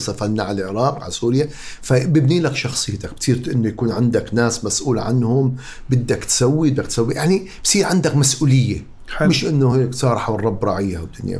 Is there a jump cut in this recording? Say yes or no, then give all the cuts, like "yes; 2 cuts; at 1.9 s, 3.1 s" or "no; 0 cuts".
no; 0 cuts